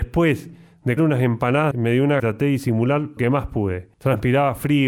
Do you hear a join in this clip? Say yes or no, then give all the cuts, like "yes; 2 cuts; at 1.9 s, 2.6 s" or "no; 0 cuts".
yes; 5 cuts; at 1.0 s, 1.7 s, 2.2 s, 3.2 s, 3.9 s